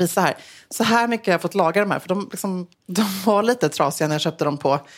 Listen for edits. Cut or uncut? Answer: cut